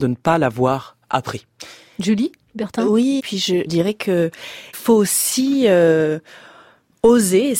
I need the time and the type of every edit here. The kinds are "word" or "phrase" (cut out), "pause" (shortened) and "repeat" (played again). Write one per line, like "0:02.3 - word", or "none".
0:03.2 - word
0:03.7 - word
0:04.7 - word